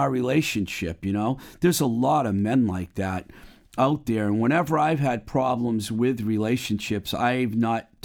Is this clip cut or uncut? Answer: uncut